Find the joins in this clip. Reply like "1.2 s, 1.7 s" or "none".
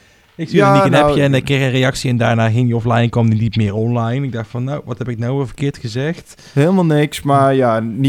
6.5 s

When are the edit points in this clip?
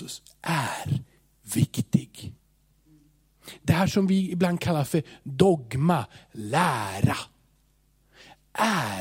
none

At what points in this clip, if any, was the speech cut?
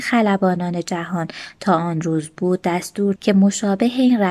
3.2 s

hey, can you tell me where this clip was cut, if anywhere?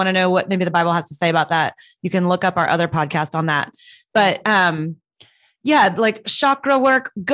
none

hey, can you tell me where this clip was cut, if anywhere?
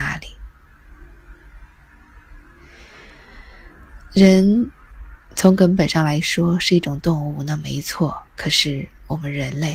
8.3 s

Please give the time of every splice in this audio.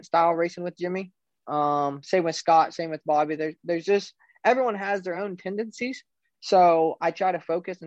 none

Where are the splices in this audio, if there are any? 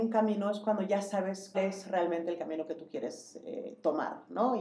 1.5 s

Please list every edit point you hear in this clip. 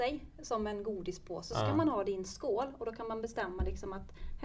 none

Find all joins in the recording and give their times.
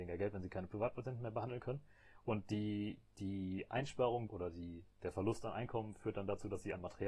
4.3 s, 4.9 s

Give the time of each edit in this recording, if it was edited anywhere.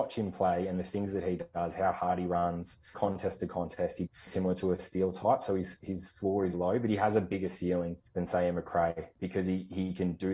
2.9 s, 4.1 s, 6.5 s, 8.1 s

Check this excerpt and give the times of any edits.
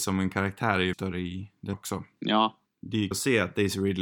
0.9 s, 1.7 s, 3.1 s

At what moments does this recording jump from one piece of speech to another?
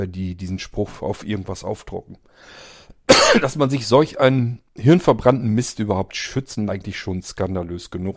4.6 s, 6.7 s

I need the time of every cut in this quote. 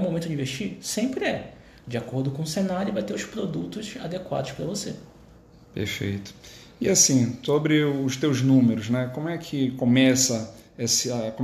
none

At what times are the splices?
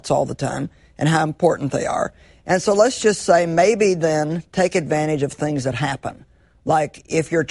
none

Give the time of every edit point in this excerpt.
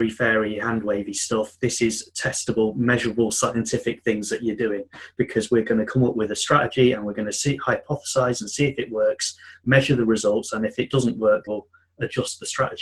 11.5 s

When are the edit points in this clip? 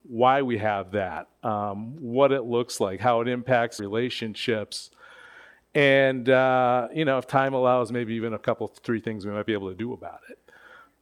3.8 s

